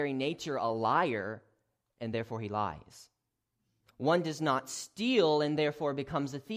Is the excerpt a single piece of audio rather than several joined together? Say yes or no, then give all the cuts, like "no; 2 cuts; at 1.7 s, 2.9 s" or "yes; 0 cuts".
yes; 0 cuts